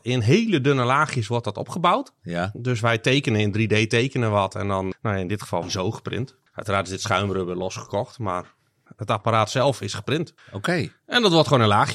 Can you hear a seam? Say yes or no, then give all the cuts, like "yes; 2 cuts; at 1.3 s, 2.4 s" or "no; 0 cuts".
yes; 5 cuts; at 4.9 s, 5.6 s, 6.5 s, 8.9 s, 10.4 s